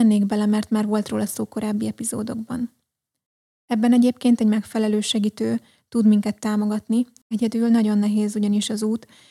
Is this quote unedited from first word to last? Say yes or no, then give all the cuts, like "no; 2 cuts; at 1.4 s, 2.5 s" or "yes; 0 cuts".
yes; 0 cuts